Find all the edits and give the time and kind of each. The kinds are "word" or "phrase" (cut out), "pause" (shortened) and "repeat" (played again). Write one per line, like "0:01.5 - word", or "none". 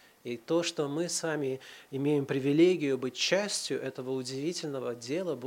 none